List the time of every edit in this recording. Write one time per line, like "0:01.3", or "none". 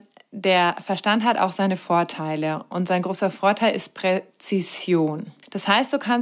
none